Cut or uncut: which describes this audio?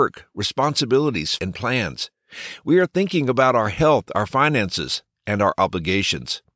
cut